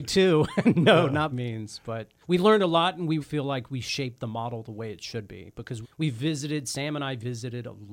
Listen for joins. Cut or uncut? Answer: cut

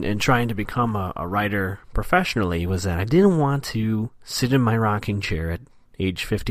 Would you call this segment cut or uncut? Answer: uncut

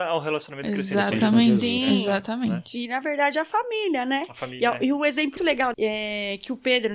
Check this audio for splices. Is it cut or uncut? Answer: cut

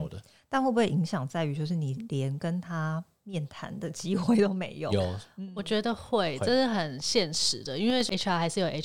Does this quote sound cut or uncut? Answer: uncut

